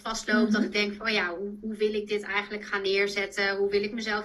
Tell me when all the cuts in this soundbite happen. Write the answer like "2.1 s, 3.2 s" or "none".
none

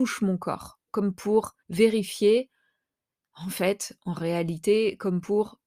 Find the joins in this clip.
1.6 s

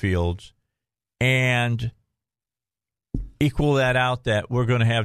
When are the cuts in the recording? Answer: none

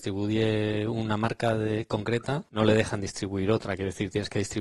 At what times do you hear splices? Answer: 2.5 s

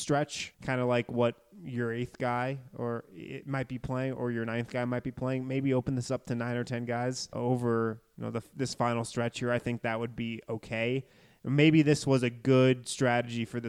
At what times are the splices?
none

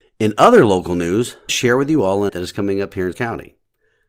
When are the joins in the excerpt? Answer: 1.5 s, 2.3 s, 3.1 s

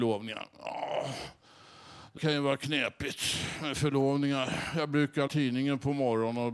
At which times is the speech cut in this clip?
2.2 s, 5.3 s

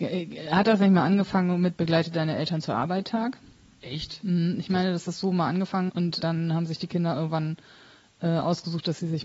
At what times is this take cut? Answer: 1.7 s, 5.9 s, 6.2 s

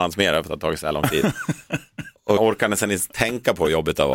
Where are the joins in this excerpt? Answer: 2.4 s

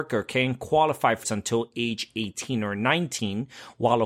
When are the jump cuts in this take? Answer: 1.2 s

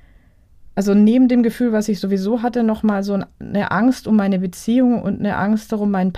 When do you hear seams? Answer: none

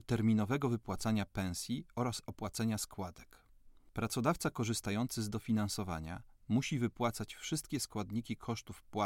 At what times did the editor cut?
none

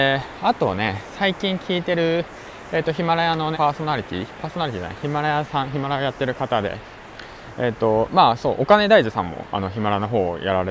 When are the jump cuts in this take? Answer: 3.5 s

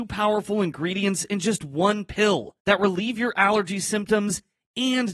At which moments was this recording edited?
2.6 s

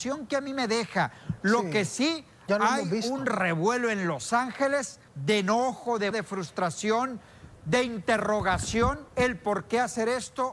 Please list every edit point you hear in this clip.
5.1 s, 6.1 s, 9.1 s

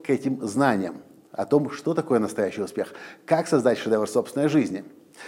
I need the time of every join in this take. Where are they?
none

